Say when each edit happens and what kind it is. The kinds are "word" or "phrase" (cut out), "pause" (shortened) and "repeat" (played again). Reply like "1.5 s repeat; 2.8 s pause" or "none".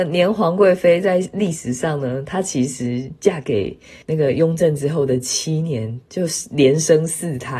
4.0 s pause; 6.0 s pause